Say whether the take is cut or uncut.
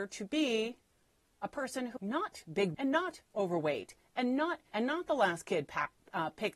cut